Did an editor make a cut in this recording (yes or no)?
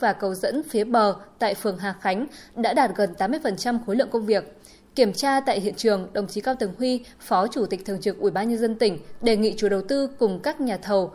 no